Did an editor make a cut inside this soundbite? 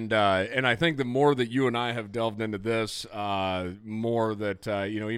no; 0 cuts

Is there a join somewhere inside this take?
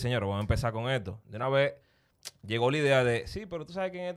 no; 0 cuts

